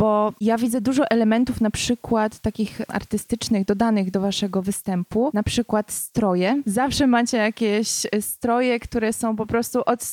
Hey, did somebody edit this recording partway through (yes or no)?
no